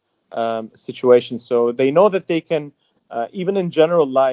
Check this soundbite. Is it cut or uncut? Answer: uncut